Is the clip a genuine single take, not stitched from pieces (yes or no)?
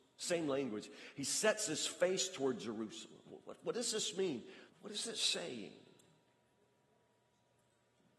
no